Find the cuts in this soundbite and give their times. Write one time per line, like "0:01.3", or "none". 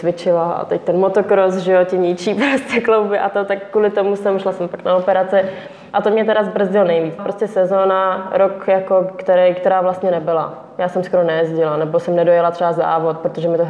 0:07.2